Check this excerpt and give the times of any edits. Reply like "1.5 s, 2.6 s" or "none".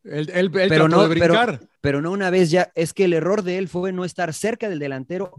1.8 s